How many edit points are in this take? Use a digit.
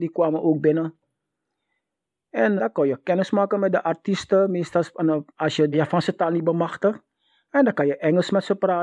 3